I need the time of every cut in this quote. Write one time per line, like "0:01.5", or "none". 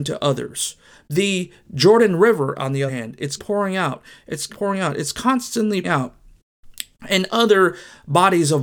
0:02.9
0:03.4
0:04.5
0:05.8